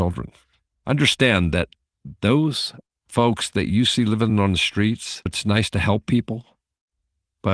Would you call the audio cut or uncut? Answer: uncut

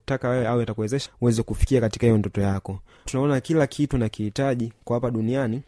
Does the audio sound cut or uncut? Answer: cut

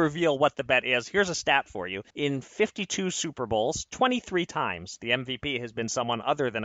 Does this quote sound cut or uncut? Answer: cut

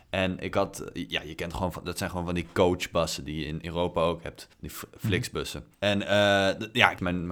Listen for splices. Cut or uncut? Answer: cut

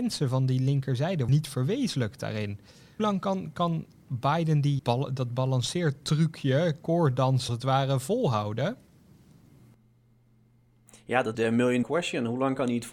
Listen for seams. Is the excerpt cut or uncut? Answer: cut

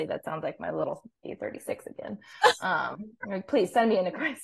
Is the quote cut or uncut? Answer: uncut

